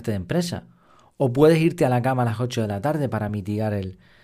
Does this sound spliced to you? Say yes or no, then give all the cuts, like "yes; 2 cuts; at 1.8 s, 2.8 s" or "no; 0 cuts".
no; 0 cuts